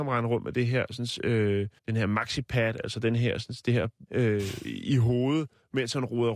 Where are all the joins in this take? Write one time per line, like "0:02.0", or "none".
0:01.8
0:04.0